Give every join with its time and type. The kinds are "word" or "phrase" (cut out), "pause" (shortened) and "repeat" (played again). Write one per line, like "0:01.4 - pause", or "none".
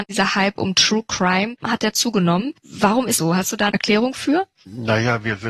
0:01.6 - word
0:03.2 - word
0:03.7 - word